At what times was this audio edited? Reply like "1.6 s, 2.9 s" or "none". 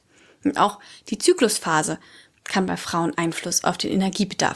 3.1 s